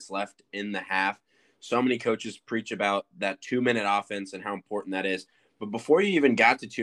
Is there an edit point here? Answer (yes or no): no